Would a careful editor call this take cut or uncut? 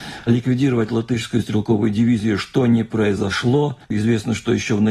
cut